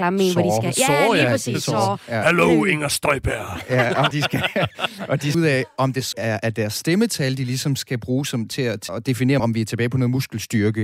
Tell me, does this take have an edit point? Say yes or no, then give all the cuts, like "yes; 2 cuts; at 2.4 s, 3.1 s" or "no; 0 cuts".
yes; 5 cuts; at 4.1 s, 5.3 s, 6.1 s, 8.9 s, 9.4 s